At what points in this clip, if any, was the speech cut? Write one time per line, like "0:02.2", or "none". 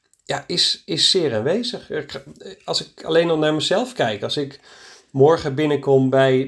none